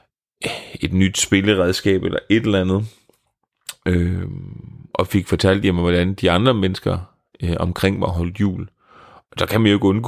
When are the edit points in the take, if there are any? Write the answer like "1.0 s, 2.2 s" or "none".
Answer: none